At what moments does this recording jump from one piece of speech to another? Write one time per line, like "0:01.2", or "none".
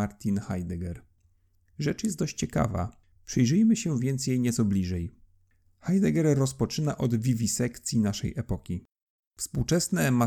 none